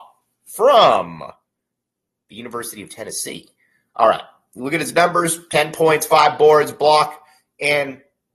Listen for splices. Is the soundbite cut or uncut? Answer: uncut